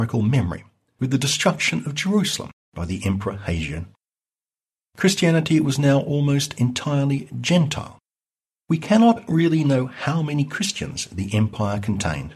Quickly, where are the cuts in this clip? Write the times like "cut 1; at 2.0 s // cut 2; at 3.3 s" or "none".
none